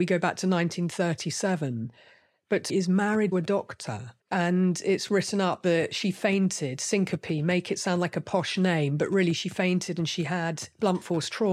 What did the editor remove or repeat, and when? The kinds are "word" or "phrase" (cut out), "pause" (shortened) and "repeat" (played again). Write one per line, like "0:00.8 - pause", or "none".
0:02.7 - phrase
0:03.3 - word
0:04.2 - pause